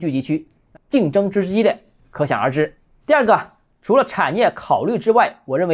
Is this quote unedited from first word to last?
yes; 0 cuts

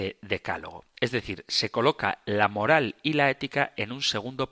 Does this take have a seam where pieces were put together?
no; 0 cuts

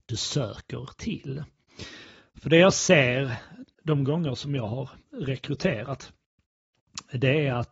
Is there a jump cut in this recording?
yes; 1 cut; at 3.7 s

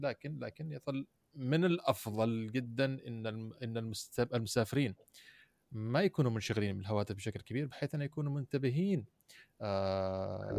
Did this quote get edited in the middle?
no; 0 cuts

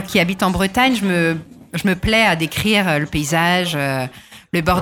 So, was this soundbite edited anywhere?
no; 0 cuts

